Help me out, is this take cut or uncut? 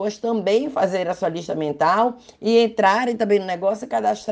uncut